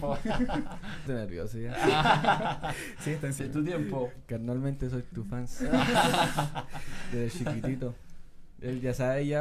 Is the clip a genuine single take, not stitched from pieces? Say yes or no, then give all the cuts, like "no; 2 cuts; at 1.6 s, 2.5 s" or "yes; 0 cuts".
no; 3 cuts; at 1.1 s, 3.4 s, 5.1 s